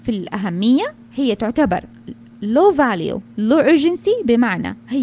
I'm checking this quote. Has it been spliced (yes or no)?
no